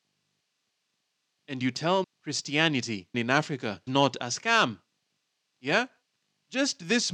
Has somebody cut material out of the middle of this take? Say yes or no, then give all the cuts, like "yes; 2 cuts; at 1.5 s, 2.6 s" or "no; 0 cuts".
yes; 3 cuts; at 2.0 s, 3.1 s, 3.9 s